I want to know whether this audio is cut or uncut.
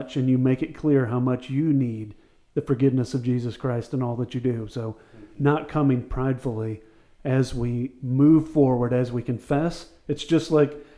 uncut